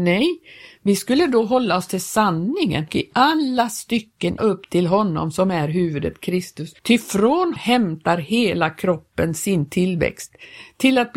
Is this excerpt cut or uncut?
cut